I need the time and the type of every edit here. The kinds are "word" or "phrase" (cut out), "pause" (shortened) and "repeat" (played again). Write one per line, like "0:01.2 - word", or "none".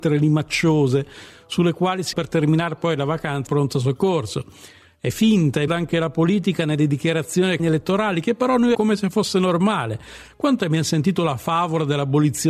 0:02.1 - word
0:03.5 - word
0:05.7 - word
0:07.6 - word
0:08.7 - word
0:10.6 - word

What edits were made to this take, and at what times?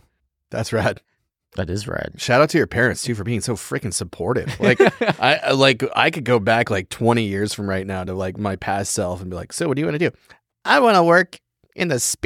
none

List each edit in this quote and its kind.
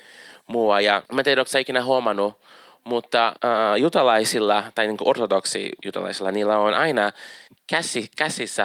0:01.0 - pause
0:03.4 - pause
0:07.5 - pause

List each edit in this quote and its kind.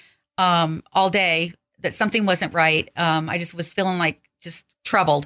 none

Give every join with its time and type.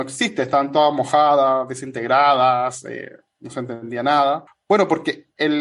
none

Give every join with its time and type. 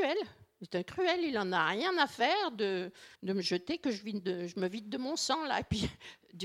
0:03.1 - pause

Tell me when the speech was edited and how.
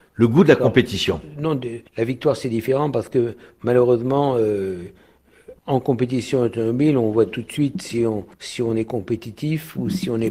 0:01.9 - pause
0:05.6 - pause
0:08.3 - pause

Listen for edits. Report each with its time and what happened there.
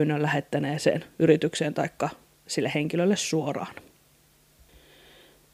none

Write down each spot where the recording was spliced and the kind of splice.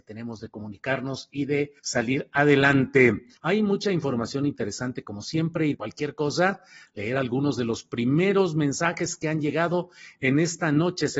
0:01.8 - pause
0:03.4 - pause
0:05.7 - phrase

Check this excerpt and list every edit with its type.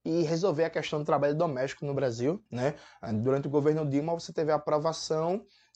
0:02.5 - pause

